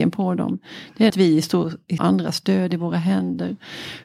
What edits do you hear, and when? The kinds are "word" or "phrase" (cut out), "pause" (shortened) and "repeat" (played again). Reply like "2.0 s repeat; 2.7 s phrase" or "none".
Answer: 1.1 s phrase; 2.0 s phrase